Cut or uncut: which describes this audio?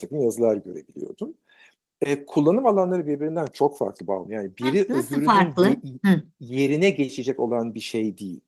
uncut